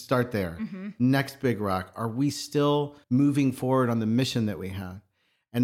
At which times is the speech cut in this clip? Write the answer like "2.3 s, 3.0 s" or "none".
3.0 s